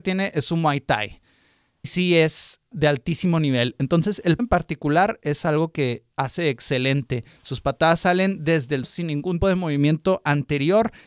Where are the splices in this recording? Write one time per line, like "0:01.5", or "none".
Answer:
0:01.8
0:02.7
0:04.4
0:08.8
0:09.4